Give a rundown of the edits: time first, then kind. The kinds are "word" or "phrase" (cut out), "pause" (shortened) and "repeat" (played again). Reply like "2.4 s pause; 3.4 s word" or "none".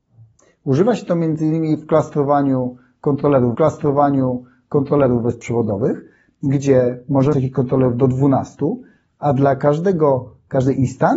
3.5 s repeat; 7.3 s word